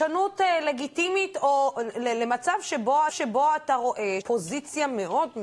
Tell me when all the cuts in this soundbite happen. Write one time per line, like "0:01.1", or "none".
0:03.1
0:04.2